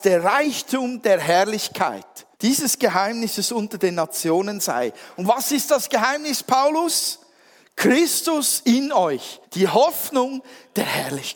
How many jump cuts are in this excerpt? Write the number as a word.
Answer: two